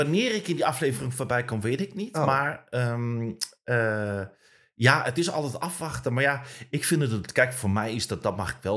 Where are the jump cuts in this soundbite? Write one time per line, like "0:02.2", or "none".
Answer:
none